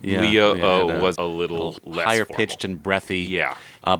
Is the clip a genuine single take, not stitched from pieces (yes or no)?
no